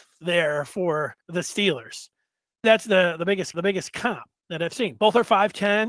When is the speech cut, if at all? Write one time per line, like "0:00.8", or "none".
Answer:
0:01.2
0:02.6
0:03.5